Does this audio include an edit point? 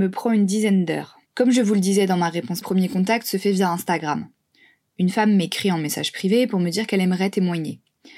yes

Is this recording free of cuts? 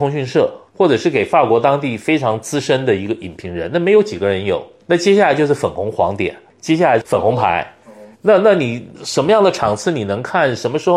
no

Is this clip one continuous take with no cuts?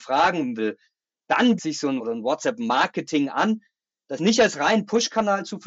no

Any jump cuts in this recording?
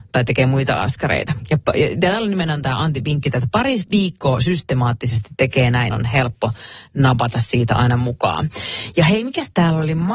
yes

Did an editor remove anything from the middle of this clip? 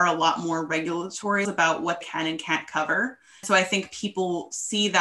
yes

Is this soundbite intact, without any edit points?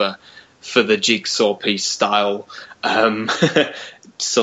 yes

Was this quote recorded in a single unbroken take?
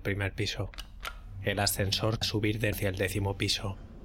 no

